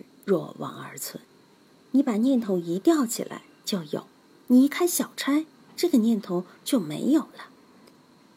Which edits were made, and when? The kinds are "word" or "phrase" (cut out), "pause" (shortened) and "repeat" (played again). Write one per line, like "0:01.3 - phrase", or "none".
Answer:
none

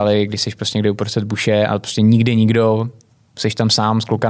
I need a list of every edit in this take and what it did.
none

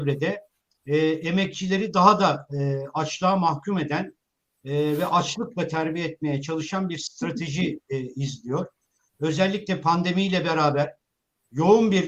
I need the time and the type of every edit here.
none

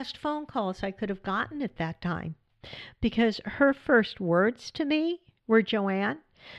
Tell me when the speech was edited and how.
none

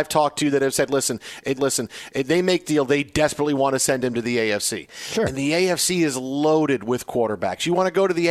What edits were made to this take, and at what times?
0:01.6 - repeat
0:02.6 - word

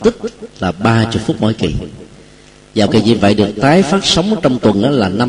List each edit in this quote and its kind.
0:02.9 - phrase

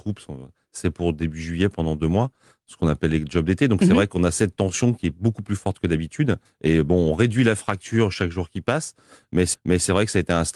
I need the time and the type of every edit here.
0:06.5 - pause
0:09.5 - repeat

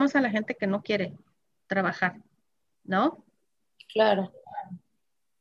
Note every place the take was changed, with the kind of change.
none

